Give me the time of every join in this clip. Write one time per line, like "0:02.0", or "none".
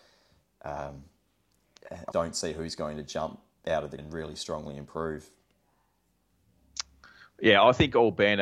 0:02.1
0:04.0

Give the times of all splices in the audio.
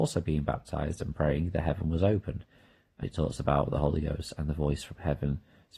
0:03.0

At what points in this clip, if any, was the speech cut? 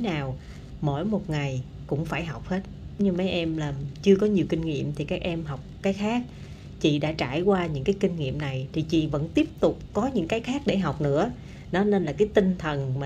none

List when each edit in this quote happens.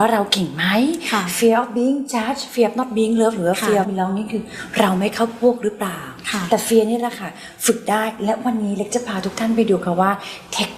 0:03.8

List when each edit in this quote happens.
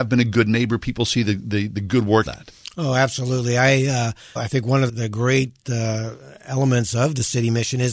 0:02.3
0:04.4
0:04.9

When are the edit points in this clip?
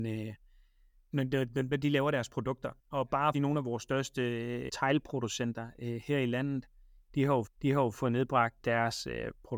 0:02.8
0:03.3
0:04.7
0:07.5
0:08.6

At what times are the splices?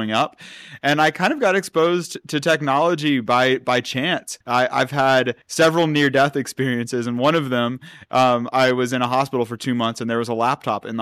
0:04.4
0:05.4

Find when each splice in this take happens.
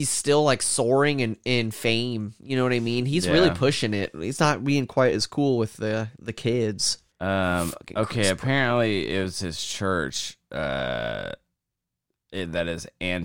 0:07.1

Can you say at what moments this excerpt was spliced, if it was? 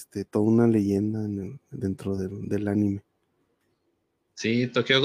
none

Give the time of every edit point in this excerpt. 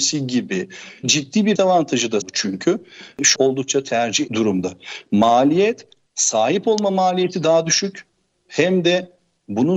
0:01.0
0:01.5
0:02.2
0:03.3
0:04.3
0:06.1

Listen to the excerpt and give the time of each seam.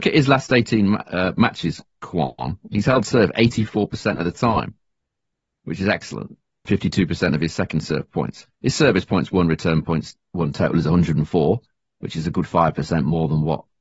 0:06.7
0:08.5

